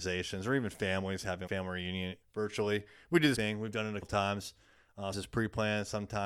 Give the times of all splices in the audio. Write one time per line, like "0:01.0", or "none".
0:01.5
0:02.2
0:03.3
0:04.0
0:05.1